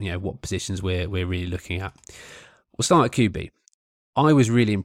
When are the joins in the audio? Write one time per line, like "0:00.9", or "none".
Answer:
none